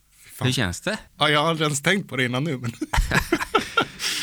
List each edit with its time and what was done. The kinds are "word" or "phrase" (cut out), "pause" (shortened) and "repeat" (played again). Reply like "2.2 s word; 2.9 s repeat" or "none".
1.1 s pause